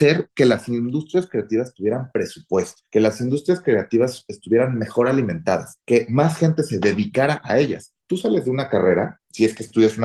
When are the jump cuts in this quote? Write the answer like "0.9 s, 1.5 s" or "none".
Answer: none